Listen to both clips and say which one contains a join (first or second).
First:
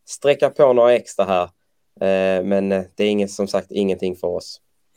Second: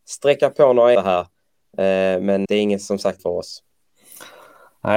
second